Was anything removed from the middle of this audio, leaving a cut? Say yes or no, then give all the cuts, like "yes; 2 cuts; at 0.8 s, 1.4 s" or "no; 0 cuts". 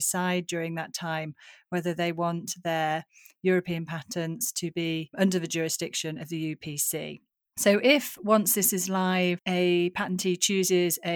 no; 0 cuts